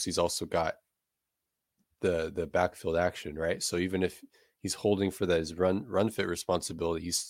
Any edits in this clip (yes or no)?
no